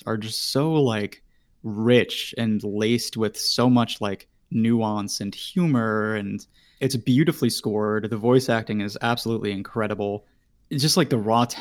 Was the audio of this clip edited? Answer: no; 0 cuts

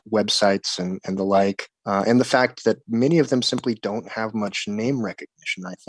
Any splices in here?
no; 0 cuts

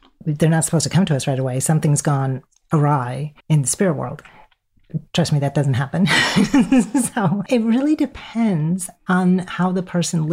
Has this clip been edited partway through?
yes; 2 cuts; at 3.4 s, 5.1 s

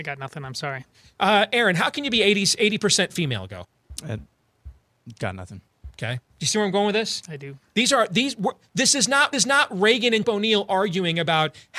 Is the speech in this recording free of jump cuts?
no; 3 cuts; at 6.3 s, 9.3 s, 10.2 s

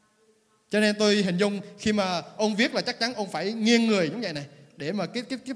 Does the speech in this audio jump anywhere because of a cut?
no; 0 cuts

